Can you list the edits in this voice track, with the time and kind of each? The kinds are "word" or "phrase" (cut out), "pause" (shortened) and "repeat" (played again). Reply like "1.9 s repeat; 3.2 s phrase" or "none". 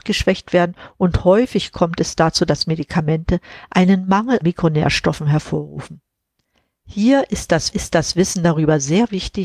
4.4 s word; 7.7 s repeat